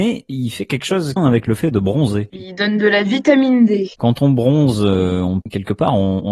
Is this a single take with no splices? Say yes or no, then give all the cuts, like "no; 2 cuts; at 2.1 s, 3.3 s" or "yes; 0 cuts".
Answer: no; 2 cuts; at 1.2 s, 3.9 s